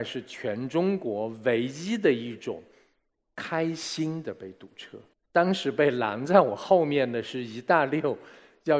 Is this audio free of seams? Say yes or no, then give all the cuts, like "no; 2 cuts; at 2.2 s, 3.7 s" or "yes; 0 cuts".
yes; 0 cuts